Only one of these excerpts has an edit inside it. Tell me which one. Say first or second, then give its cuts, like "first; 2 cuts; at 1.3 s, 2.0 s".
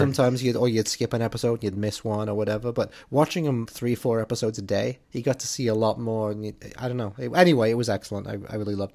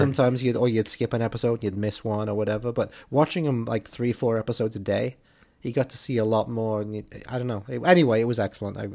first; 2 cuts; at 3.7 s, 5.0 s